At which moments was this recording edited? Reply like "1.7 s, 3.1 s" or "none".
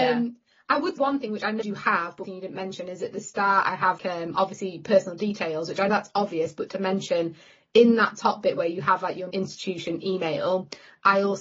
1.0 s, 1.6 s, 2.2 s, 4.0 s, 5.9 s, 6.7 s, 9.3 s